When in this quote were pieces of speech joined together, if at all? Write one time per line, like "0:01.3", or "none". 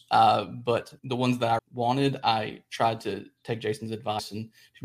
0:01.0
0:01.6